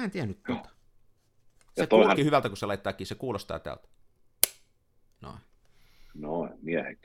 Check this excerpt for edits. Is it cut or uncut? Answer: cut